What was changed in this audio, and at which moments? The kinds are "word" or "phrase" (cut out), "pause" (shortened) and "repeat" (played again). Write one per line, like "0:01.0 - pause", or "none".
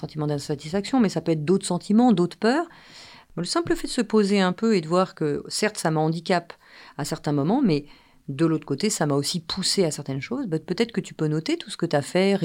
none